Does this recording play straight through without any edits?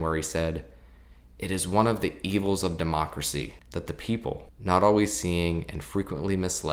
yes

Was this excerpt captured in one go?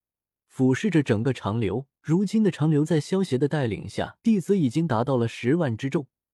no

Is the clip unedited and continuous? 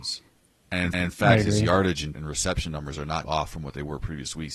no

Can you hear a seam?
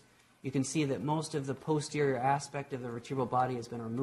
no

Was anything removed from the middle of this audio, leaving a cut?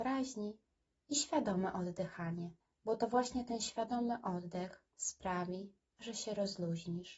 yes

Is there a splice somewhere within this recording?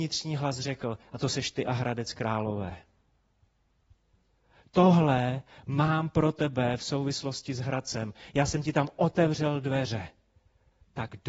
no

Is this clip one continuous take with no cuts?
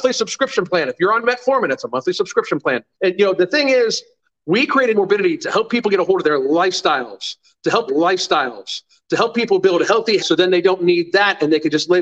no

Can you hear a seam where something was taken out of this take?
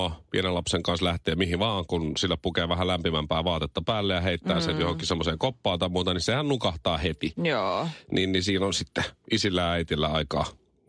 no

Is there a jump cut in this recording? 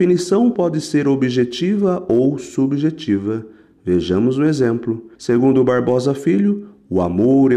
yes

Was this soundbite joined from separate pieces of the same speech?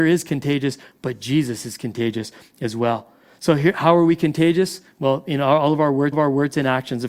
yes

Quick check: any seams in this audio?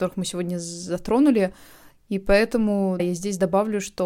yes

